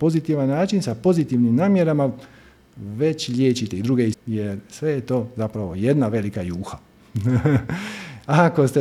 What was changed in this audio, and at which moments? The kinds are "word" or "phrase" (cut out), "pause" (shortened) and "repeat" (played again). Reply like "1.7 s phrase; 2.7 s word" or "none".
4.1 s word